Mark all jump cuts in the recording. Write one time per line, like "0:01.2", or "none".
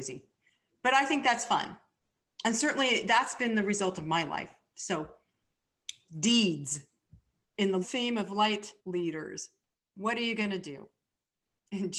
0:07.8
0:08.8